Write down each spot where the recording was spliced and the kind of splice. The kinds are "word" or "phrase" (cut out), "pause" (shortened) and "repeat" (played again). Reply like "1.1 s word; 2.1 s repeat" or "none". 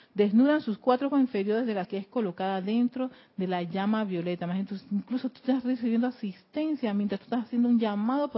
1.1 s word; 1.8 s word

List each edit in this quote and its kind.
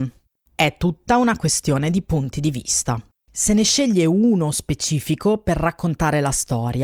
3.2 s pause

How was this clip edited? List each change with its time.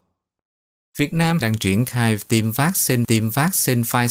1.4 s phrase; 3.0 s repeat

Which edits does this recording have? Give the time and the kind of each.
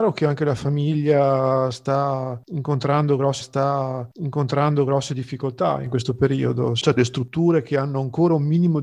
3.4 s repeat; 7.0 s word

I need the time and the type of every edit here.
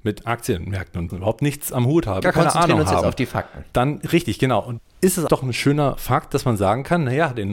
1.1 s word; 2.2 s word; 4.8 s word; 5.3 s word

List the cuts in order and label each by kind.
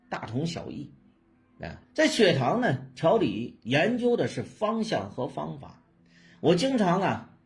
1.8 s pause

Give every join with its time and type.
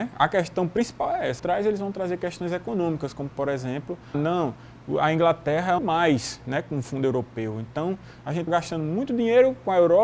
1.4 s phrase; 4.1 s word; 5.8 s phrase; 8.5 s word

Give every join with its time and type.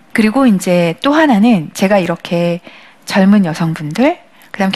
none

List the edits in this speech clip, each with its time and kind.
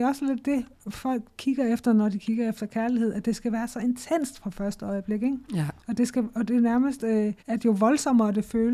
5.8 s pause; 7.4 s pause

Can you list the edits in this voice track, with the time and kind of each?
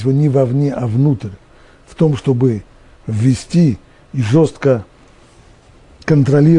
none

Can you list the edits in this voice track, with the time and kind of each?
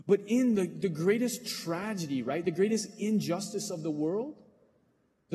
none

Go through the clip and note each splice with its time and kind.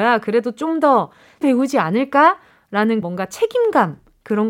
1.4 s word; 3.0 s word

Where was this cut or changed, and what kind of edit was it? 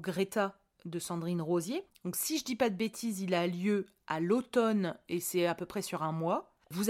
1.9 s pause

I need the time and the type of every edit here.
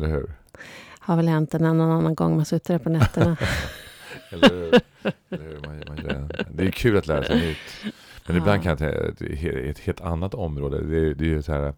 6.0 s word

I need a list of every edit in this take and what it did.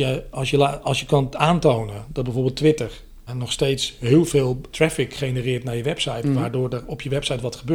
3.3 s word; 4.7 s word

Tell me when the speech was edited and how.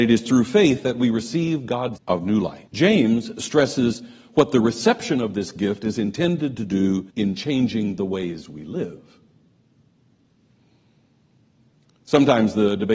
2.0 s word; 2.7 s pause; 7.1 s pause

